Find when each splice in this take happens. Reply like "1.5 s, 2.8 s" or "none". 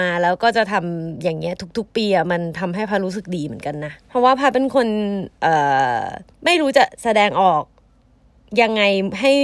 4.0 s, 6.3 s

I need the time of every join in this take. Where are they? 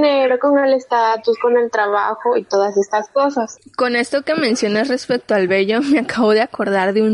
none

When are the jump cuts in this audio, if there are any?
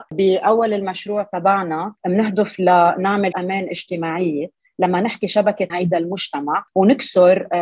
3.3 s, 5.7 s

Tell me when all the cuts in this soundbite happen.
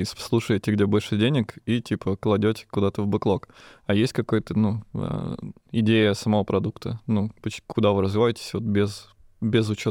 none

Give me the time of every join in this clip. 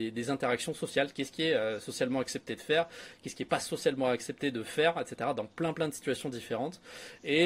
none

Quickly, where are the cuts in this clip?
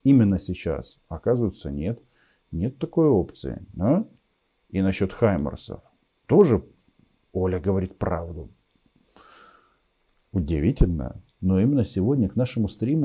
none

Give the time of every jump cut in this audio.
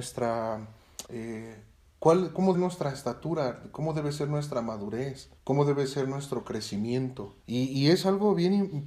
1.1 s, 2.5 s, 5.4 s, 7.4 s

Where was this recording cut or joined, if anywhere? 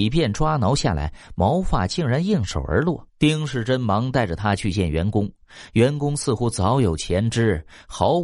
3.1 s

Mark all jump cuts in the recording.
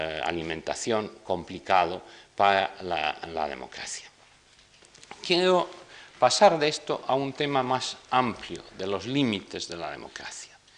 none

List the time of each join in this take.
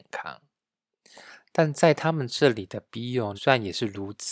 3.3 s

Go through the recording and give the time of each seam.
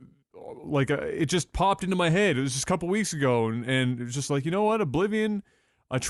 none

